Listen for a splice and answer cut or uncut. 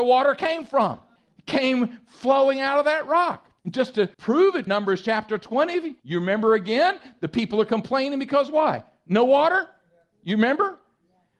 cut